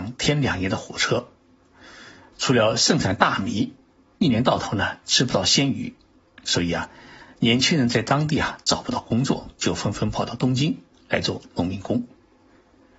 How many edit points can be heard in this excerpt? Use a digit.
0